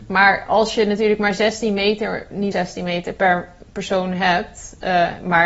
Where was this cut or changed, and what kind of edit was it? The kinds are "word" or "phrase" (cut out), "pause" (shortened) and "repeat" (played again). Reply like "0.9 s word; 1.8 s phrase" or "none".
2.5 s word